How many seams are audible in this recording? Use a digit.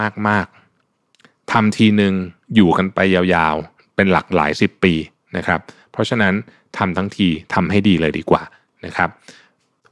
0